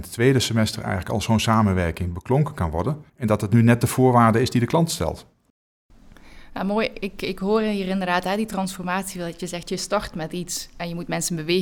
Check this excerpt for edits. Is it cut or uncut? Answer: cut